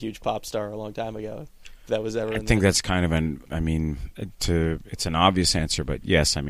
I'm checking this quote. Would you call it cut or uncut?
cut